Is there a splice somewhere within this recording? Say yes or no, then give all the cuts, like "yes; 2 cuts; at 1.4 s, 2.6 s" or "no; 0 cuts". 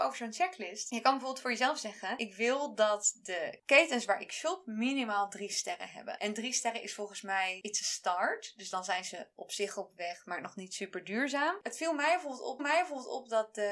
yes; 1 cut; at 12.6 s